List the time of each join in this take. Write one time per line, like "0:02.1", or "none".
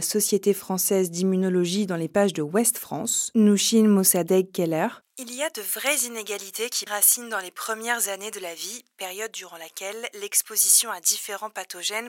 0:06.9